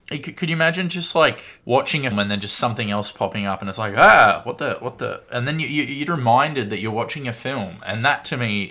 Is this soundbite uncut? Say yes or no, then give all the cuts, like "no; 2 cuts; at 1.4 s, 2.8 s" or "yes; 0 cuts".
no; 3 cuts; at 1.6 s, 2.1 s, 6.1 s